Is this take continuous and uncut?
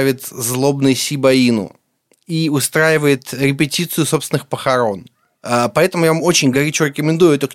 yes; 0 cuts

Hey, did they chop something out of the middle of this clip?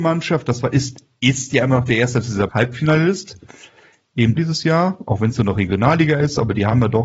yes; 2 cuts; at 2.5 s, 4.4 s

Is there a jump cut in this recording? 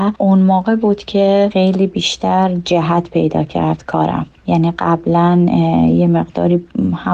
no; 0 cuts

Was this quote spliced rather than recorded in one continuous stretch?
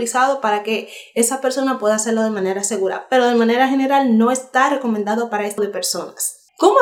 yes; 1 cut; at 5.6 s

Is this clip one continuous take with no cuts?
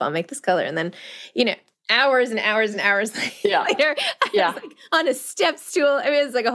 yes; 0 cuts

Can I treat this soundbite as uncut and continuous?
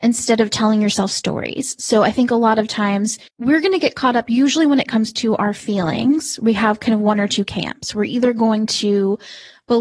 no; 1 cut; at 3.3 s

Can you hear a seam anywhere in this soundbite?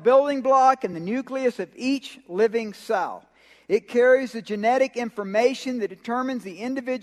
no; 0 cuts

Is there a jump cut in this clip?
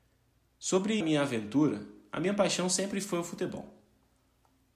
yes; 1 cut; at 1.0 s

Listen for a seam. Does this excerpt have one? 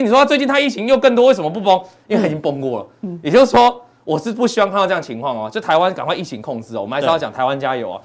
no; 0 cuts

